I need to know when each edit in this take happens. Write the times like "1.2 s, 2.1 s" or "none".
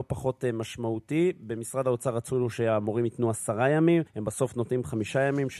4.1 s